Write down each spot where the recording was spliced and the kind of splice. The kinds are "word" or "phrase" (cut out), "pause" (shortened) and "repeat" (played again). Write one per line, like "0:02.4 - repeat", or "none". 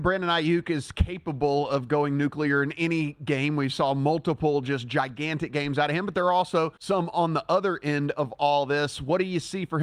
0:06.8 - pause